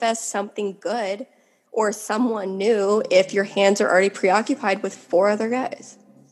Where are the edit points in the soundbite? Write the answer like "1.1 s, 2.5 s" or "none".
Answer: none